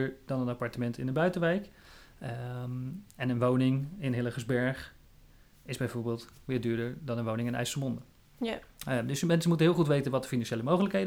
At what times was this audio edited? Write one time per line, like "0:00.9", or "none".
none